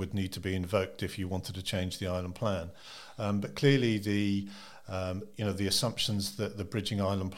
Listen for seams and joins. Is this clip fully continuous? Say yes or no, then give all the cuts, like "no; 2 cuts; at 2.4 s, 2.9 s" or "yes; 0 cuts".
yes; 0 cuts